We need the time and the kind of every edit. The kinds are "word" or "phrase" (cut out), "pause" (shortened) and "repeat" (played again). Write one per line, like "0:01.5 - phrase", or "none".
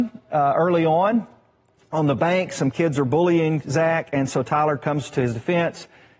none